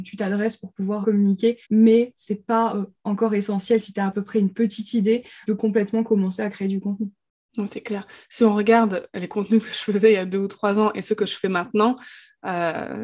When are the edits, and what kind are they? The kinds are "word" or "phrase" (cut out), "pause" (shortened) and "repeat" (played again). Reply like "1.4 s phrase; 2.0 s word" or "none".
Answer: 1.0 s word; 1.6 s pause; 5.4 s phrase